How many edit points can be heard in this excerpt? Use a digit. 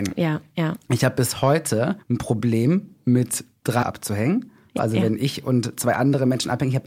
3